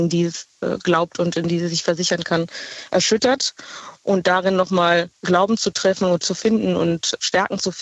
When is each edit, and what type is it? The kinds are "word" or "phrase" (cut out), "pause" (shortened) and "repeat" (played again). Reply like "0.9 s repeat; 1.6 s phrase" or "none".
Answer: 5.1 s pause

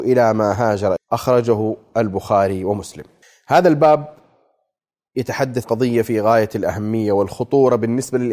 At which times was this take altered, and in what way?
1.0 s word; 3.2 s pause; 5.6 s word

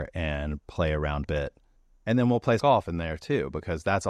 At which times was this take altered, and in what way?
1.2 s phrase; 1.8 s pause; 2.6 s word

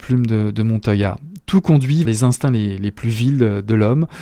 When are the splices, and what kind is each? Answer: 2.0 s word

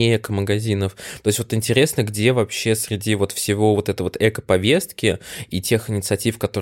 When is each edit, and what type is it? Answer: none

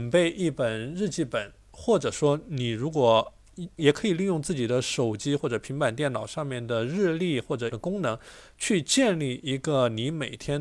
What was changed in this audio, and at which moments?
3.8 s word; 7.7 s word

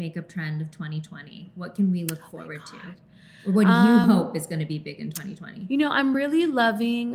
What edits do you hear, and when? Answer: none

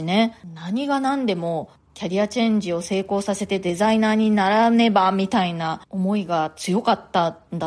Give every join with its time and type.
5.9 s pause

